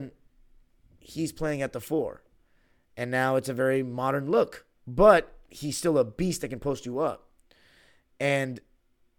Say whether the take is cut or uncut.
cut